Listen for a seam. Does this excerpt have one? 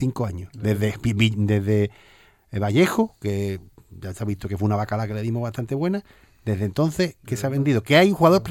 no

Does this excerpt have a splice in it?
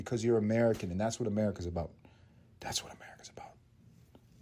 no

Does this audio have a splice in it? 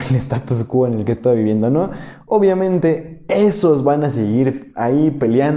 no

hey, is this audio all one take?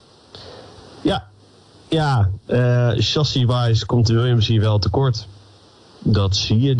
yes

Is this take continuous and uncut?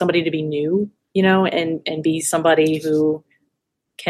no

